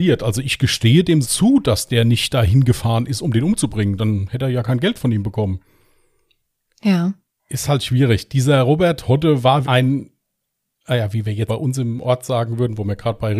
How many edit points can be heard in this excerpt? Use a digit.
3